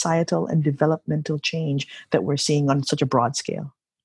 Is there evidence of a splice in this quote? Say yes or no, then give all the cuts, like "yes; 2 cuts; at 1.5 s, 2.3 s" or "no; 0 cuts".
no; 0 cuts